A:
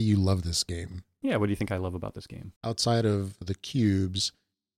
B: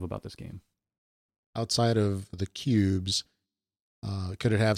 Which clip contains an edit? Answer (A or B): A